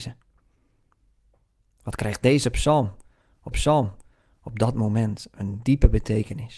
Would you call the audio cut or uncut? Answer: cut